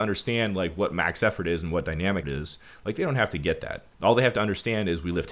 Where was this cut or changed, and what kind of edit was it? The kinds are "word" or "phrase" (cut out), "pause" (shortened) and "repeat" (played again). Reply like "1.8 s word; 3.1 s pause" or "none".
2.2 s word; 3.9 s pause